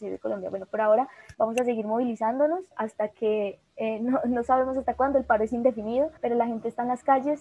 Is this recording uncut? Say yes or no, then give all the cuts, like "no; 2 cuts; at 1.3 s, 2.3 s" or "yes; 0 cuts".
no; 3 cuts; at 1.3 s, 2.7 s, 6.2 s